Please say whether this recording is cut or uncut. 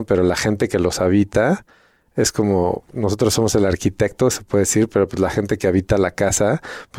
uncut